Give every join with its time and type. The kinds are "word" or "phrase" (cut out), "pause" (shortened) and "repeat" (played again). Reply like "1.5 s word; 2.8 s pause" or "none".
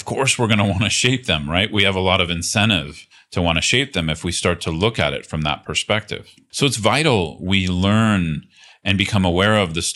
none